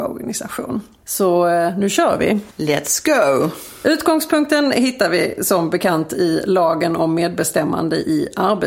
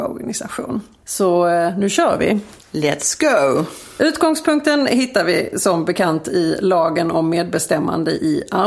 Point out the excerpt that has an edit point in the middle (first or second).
first